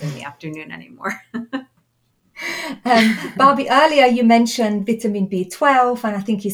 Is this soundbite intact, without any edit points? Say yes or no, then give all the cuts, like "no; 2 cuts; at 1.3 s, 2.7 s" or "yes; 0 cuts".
yes; 0 cuts